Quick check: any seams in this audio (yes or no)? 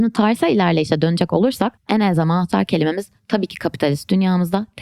yes